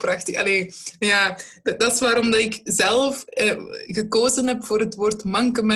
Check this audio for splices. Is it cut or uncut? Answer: uncut